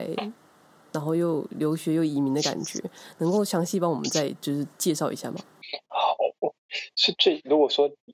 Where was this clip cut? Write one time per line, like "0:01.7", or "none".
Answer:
0:04.7